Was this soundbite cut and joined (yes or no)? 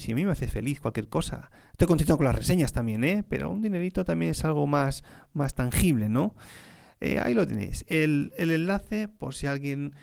no